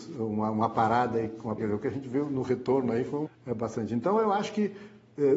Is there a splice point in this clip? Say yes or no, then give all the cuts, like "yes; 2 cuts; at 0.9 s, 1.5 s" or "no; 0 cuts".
yes; 2 cuts; at 1.6 s, 3.3 s